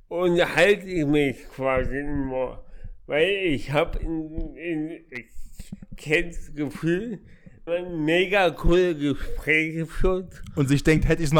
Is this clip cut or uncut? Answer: cut